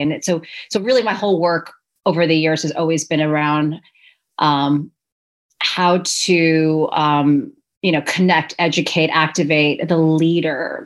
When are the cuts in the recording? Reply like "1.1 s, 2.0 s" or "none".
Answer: none

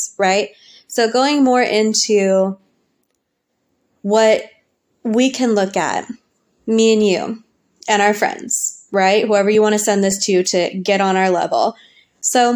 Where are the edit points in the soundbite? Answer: none

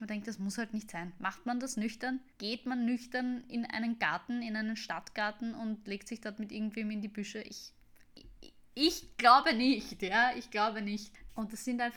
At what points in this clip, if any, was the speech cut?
2.3 s

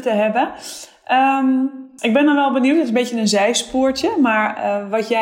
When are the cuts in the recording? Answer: none

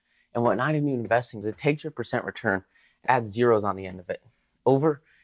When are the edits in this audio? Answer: 1.4 s, 3.1 s

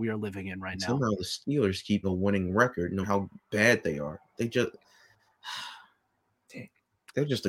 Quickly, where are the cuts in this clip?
2.0 s, 3.0 s

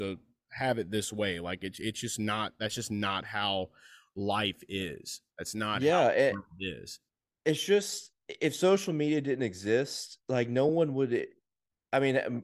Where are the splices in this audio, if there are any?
none

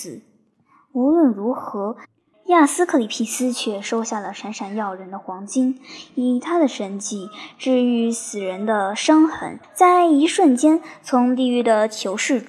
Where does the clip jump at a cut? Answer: 2.3 s, 9.6 s

